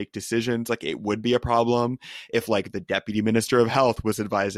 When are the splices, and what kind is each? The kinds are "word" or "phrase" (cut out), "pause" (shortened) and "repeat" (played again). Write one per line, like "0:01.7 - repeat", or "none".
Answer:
none